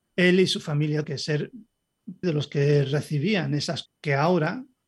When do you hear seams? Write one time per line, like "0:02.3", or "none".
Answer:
0:01.0
0:02.2
0:03.9